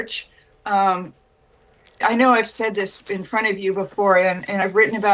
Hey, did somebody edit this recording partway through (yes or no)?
no